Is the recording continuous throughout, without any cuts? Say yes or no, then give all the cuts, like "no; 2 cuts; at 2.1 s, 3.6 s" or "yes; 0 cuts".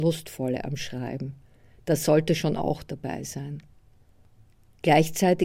yes; 0 cuts